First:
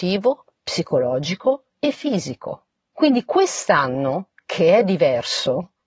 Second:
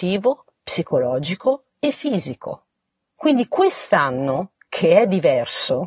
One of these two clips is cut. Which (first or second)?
first